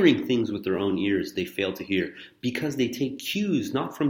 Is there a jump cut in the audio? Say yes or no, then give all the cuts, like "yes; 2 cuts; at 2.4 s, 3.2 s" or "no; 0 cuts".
no; 0 cuts